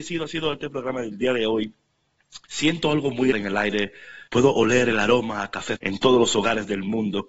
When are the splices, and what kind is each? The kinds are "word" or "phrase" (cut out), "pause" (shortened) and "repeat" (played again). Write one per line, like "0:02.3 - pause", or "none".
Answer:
0:02.4 - pause
0:03.3 - word
0:04.3 - pause
0:05.8 - word